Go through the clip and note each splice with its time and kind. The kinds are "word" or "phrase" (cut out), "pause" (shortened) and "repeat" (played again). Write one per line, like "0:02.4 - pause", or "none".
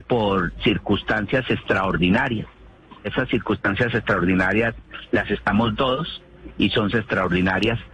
0:03.0 - word
0:05.7 - word
0:06.9 - word